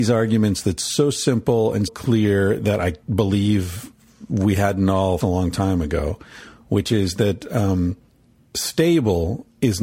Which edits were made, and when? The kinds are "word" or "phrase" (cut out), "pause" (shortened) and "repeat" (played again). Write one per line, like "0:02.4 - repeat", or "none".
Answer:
0:01.9 - word
0:03.0 - word
0:05.2 - phrase
0:08.1 - pause